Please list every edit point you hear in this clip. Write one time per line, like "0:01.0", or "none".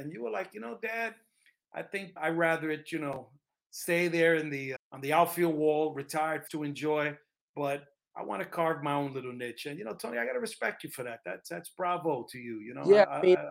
0:02.2
0:04.8
0:06.5

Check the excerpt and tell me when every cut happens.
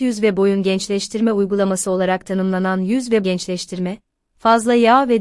0:03.2

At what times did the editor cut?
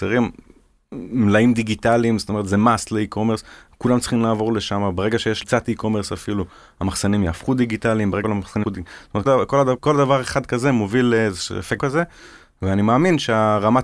0:05.4
0:08.2
0:08.6
0:09.3
0:09.8
0:11.8

